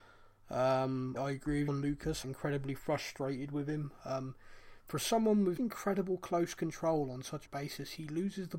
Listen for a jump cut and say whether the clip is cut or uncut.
cut